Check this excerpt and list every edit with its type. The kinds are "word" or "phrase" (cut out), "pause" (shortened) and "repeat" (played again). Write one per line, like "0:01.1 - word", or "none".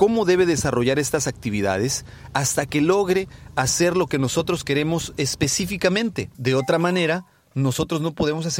0:06.3 - pause